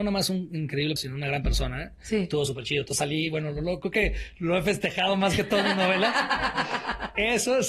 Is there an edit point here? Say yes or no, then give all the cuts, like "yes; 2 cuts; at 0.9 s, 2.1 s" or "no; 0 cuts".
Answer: yes; 1 cut; at 1.0 s